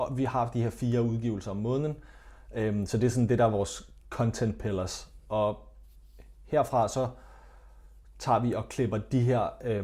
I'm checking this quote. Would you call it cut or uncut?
uncut